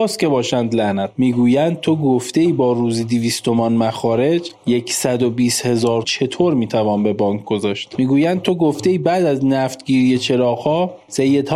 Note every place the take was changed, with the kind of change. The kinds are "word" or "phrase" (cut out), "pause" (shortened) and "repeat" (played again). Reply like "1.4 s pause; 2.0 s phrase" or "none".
6.0 s word